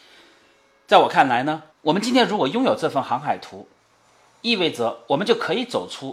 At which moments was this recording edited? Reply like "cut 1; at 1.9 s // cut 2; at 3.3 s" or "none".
cut 1; at 1.7 s